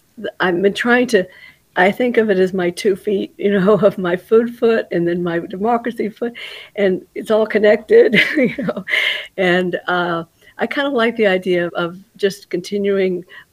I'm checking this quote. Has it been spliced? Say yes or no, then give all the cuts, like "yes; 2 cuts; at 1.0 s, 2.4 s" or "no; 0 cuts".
yes; 1 cut; at 11.7 s